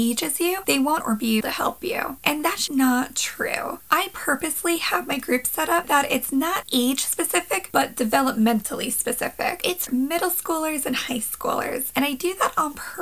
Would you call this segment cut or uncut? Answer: cut